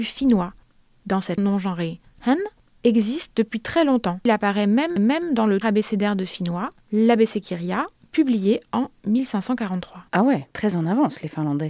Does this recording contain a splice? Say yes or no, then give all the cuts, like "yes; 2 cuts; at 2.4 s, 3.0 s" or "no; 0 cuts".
yes; 6 cuts; at 1.4 s, 4.3 s, 5.0 s, 5.6 s, 10.1 s, 10.5 s